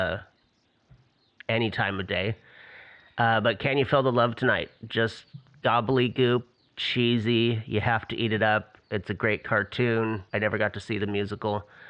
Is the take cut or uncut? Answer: cut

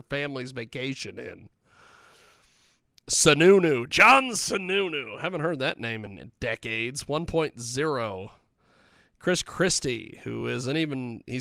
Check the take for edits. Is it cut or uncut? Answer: uncut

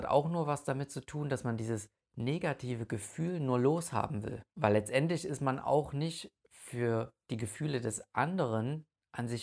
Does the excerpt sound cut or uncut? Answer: cut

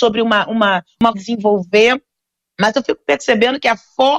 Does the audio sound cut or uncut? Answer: cut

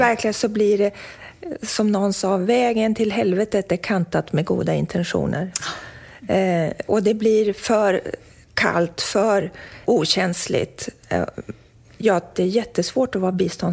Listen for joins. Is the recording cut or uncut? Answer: cut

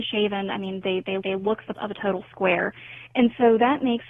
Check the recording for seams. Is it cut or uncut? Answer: cut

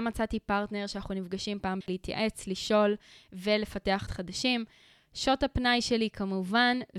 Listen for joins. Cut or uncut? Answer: cut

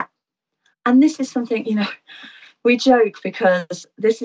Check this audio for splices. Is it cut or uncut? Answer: uncut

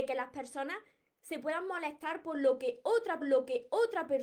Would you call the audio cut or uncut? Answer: cut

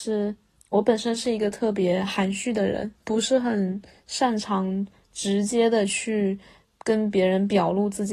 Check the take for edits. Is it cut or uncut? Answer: uncut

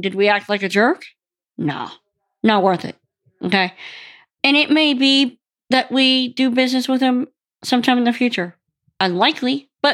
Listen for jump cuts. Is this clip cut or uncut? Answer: uncut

